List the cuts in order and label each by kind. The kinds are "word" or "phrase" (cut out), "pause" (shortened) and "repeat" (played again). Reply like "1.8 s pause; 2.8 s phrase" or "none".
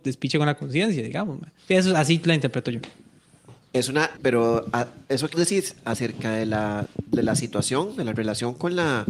1.6 s pause; 4.2 s word; 5.3 s word